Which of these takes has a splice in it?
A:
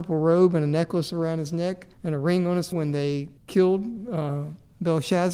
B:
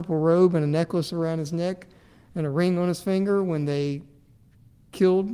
A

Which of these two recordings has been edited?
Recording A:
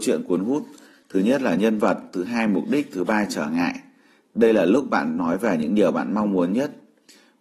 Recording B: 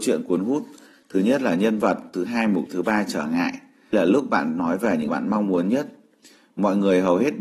B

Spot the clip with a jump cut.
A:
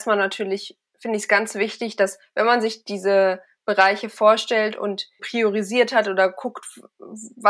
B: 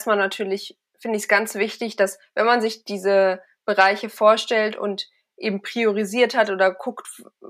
A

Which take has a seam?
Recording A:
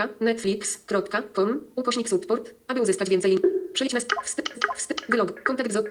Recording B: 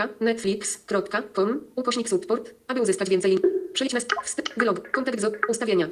A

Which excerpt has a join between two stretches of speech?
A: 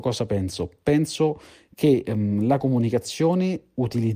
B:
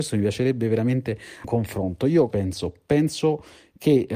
B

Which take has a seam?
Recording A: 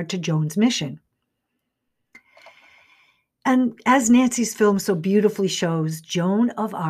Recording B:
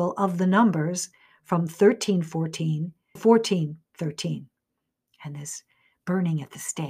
B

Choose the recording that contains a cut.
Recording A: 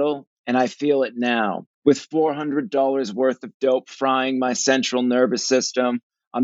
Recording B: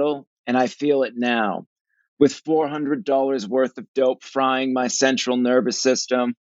A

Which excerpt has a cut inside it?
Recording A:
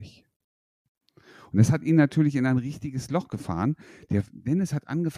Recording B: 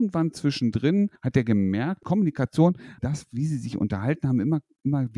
B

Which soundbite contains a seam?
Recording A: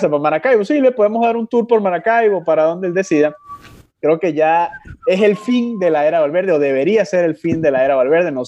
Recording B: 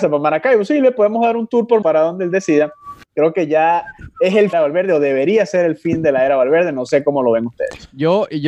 B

